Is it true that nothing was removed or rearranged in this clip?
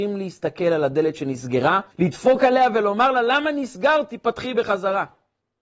no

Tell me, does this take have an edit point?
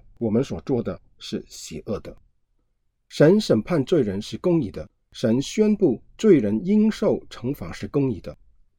no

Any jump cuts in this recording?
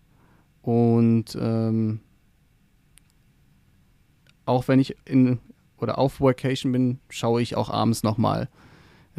no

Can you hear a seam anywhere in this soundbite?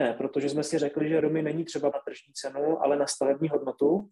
yes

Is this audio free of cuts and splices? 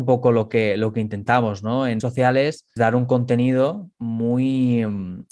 no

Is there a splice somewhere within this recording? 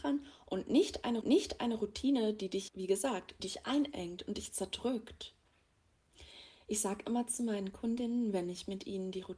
yes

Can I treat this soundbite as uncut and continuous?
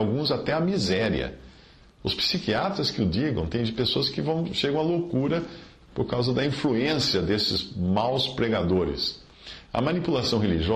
yes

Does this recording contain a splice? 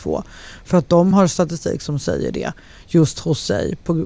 no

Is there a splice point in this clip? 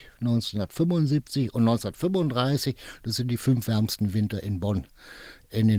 no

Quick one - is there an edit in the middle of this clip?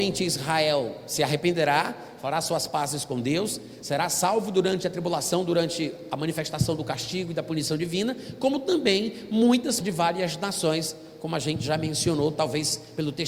yes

